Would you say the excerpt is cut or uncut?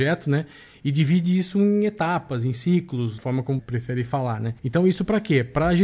cut